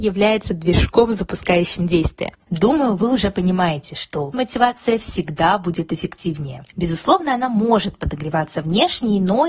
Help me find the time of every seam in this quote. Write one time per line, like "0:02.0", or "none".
0:02.4
0:04.3
0:06.7